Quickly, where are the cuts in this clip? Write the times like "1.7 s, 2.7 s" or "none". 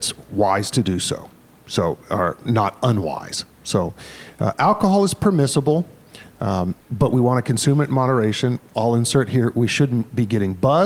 1.5 s, 6.8 s